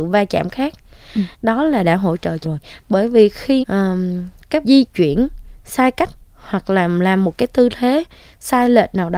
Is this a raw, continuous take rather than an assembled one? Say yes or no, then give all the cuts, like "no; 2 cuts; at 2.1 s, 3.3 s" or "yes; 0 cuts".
no; 5 cuts; at 1.3 s, 2.4 s, 3.6 s, 4.6 s, 6.2 s